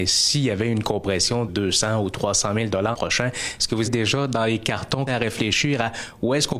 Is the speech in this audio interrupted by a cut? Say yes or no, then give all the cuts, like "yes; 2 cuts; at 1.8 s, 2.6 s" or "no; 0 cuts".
yes; 4 cuts; at 1.5 s, 2.9 s, 3.8 s, 5.1 s